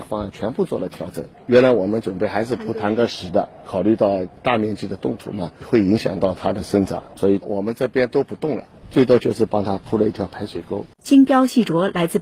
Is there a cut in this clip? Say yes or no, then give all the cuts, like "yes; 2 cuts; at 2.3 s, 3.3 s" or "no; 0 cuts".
yes; 1 cut; at 10.9 s